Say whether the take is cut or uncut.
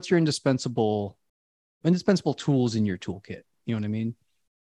uncut